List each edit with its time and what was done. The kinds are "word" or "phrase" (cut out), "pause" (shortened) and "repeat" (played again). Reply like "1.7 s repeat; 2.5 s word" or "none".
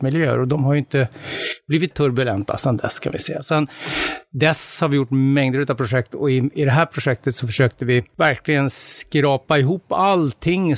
1.9 s word

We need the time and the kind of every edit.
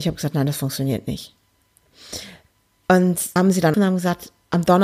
3.4 s word; 3.7 s word

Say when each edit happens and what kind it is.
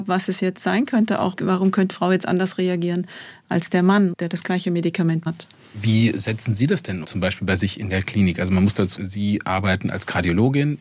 1.9 s word; 5.3 s word; 7.0 s word; 9.0 s word

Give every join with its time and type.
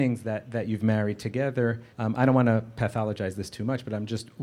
1.9 s pause

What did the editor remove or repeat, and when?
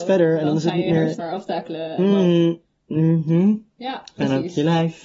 1.2 s word

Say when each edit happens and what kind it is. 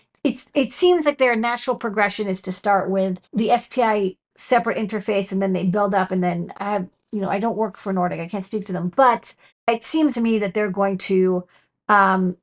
3.2 s pause; 6.5 s word; 9.5 s pause; 10.1 s word

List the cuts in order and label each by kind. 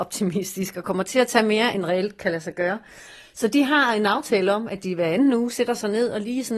none

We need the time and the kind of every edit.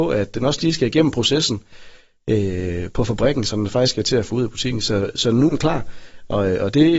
5.5 s word

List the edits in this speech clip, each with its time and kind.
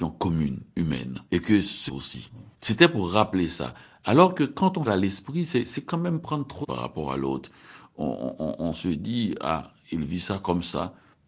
1.3 s pause; 1.9 s phrase; 2.5 s pause; 4.9 s phrase; 6.6 s phrase

